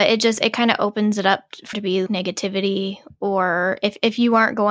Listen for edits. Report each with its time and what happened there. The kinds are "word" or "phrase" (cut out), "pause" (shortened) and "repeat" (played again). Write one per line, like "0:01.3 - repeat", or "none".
0:01.7 - word
0:02.1 - word

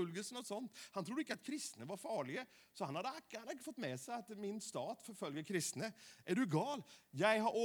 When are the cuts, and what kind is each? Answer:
none

